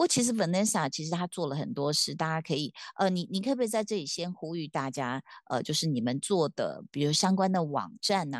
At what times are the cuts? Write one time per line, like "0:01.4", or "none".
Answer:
none